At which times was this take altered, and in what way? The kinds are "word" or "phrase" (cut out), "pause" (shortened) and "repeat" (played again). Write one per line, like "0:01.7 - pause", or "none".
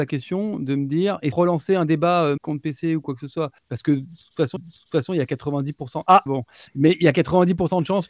0:01.3 - phrase
0:02.4 - word
0:03.6 - pause
0:04.6 - repeat
0:06.3 - word